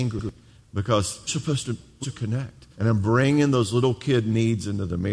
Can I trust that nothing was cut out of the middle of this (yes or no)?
no